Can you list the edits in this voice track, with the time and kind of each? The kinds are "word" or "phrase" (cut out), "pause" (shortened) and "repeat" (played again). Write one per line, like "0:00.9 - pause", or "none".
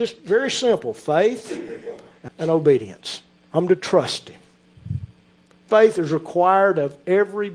0:02.3 - word